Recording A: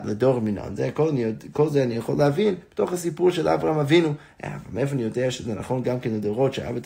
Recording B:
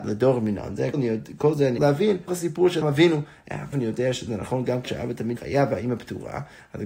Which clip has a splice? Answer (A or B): B